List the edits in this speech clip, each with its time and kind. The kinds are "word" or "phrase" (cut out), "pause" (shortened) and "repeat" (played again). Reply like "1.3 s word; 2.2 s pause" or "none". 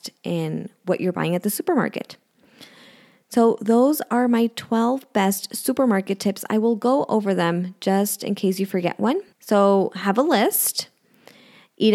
9.3 s pause